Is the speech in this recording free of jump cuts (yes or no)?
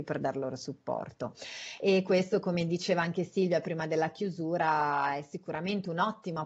yes